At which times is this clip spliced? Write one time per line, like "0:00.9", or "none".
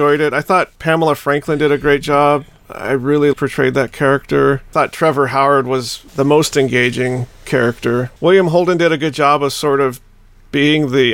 0:03.3
0:06.1
0:08.2